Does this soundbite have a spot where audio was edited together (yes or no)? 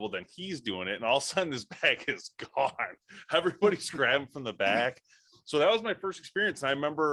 no